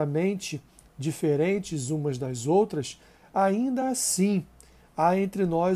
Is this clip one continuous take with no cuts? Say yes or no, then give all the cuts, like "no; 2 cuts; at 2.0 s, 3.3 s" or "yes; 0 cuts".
yes; 0 cuts